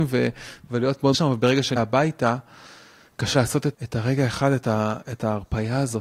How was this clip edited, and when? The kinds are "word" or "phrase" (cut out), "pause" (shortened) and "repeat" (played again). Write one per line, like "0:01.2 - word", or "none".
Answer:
0:01.1 - word
0:01.8 - word
0:03.3 - word
0:03.7 - word